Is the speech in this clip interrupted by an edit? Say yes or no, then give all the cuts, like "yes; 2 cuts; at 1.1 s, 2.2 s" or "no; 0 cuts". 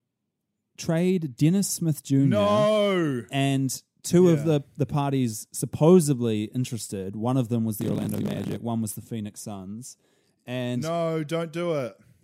no; 0 cuts